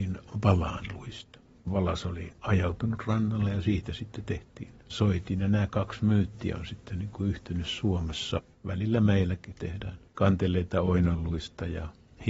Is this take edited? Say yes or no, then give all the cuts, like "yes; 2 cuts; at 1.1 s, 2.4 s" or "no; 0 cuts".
no; 0 cuts